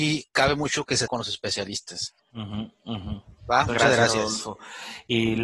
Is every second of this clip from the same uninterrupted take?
no; 3 cuts; at 1.1 s, 2.2 s, 3.7 s

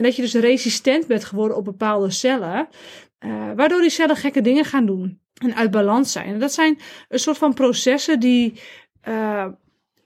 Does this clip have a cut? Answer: yes; 1 cut; at 5.3 s

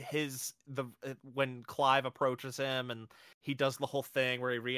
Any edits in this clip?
no; 0 cuts

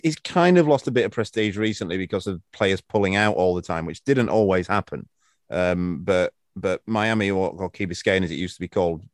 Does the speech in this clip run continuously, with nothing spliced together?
yes; 0 cuts

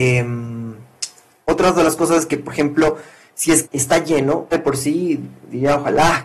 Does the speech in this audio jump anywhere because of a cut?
yes; 2 cuts; at 3.6 s, 4.5 s

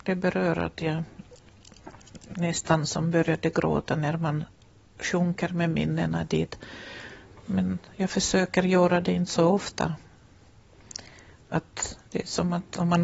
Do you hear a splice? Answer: no; 0 cuts

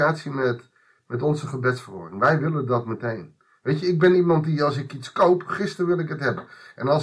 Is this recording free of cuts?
yes; 0 cuts

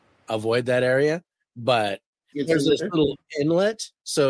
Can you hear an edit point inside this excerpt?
yes; 1 cut; at 2.3 s

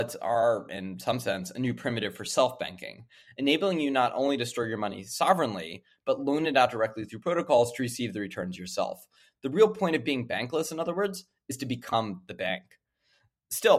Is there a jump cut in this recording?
no; 0 cuts

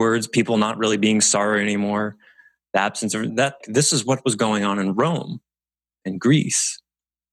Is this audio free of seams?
no; 2 cuts; at 3.3 s, 3.6 s

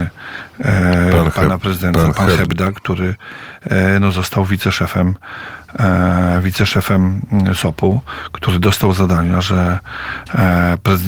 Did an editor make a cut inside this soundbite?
no; 0 cuts

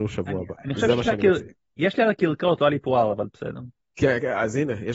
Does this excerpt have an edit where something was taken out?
no; 0 cuts

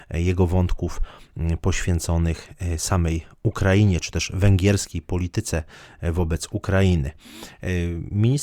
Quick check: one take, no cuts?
yes; 0 cuts

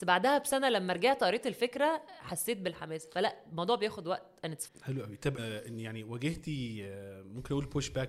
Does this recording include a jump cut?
yes; 2 cuts; at 4.7 s, 5.4 s

